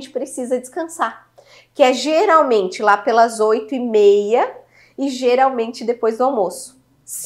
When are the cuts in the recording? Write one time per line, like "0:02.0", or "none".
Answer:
none